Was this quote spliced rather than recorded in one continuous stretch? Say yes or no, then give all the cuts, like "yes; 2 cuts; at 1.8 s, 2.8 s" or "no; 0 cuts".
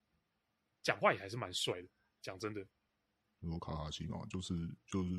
no; 0 cuts